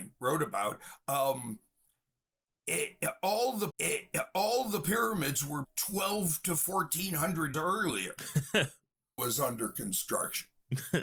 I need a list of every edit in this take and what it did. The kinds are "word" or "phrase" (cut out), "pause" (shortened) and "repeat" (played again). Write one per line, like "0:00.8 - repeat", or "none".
0:03.7 - repeat
0:05.6 - word
0:07.5 - word
0:09.2 - phrase